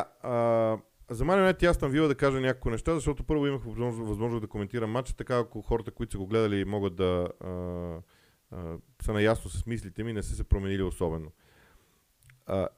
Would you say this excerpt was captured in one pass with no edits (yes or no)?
yes